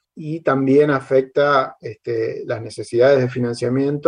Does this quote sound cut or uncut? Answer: uncut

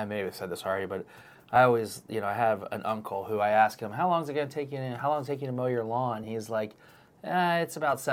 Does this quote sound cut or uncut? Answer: uncut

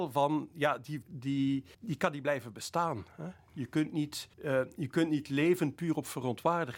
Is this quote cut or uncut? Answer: cut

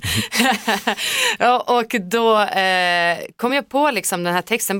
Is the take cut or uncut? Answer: uncut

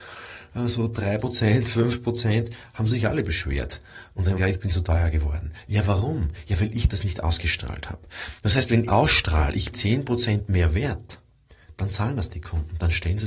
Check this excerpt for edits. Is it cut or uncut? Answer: cut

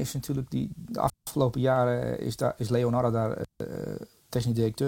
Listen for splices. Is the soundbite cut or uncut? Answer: uncut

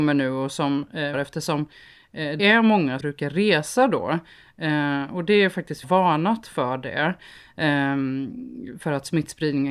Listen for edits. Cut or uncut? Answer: cut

